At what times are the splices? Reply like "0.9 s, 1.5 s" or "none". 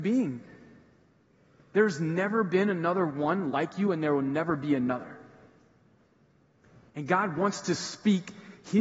none